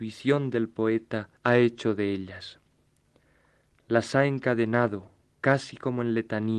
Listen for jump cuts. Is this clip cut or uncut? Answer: cut